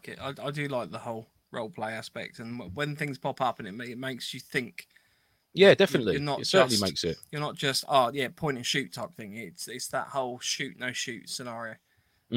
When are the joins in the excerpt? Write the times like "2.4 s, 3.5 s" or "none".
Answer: none